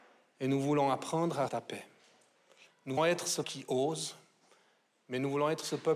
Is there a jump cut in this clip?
yes; 3 cuts; at 1.5 s, 3.0 s, 3.4 s

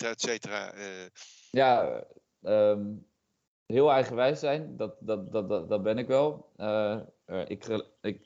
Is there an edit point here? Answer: no; 0 cuts

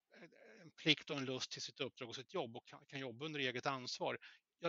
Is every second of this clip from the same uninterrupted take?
yes; 0 cuts

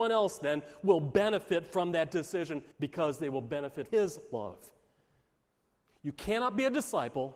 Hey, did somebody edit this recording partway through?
yes; 2 cuts; at 2.7 s, 3.9 s

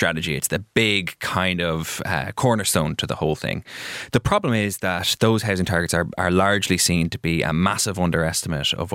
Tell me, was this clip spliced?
no; 0 cuts

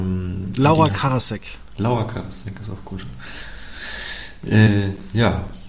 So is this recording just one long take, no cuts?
yes; 0 cuts

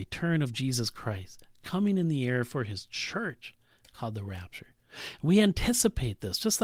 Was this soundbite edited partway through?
no; 0 cuts

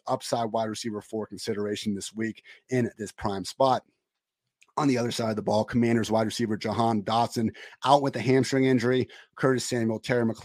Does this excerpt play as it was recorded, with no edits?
yes; 0 cuts

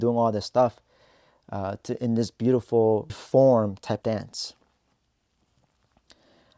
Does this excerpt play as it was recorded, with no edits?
no; 2 cuts; at 3.1 s, 4.0 s

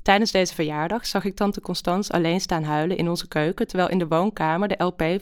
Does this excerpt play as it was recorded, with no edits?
yes; 0 cuts

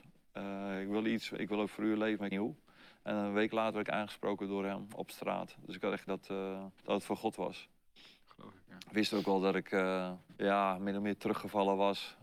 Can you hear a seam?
yes; 4 cuts; at 2.3 s, 6.1 s, 6.8 s, 10.4 s

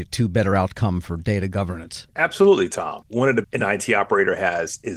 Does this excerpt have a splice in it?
yes; 1 cut; at 3.4 s

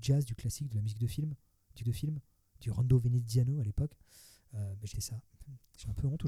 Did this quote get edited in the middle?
yes; 2 cuts; at 1.8 s, 4.9 s

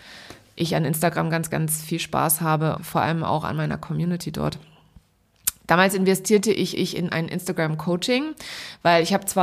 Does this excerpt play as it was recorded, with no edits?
no; 3 cuts; at 1.5 s, 2.8 s, 6.7 s

